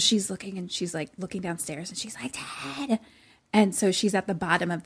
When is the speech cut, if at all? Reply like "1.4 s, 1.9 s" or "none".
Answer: none